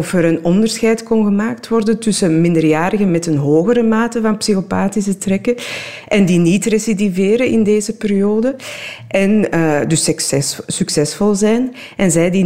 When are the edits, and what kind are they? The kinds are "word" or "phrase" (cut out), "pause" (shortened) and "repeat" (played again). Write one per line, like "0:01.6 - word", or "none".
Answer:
none